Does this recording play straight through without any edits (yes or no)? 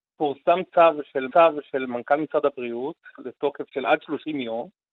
no